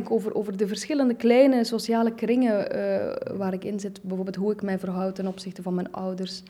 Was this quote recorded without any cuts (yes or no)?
yes